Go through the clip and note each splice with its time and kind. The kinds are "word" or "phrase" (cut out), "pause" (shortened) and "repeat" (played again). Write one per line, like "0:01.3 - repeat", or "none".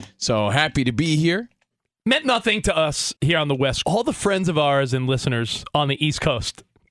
0:03.2 - pause
0:03.8 - phrase